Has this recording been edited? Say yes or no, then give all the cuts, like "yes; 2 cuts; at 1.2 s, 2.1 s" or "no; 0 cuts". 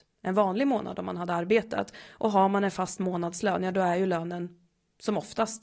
no; 0 cuts